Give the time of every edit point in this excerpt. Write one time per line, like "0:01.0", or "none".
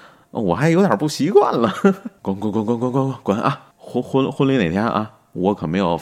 0:03.7